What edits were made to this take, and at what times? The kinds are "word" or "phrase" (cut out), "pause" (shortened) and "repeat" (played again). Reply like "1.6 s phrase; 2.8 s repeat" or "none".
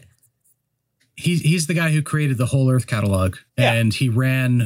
3.5 s pause